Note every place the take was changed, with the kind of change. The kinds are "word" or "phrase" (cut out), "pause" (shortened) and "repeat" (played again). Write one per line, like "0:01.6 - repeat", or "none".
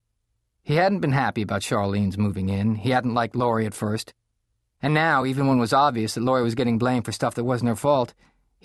none